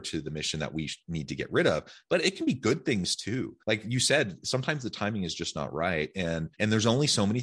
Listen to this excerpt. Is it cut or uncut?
cut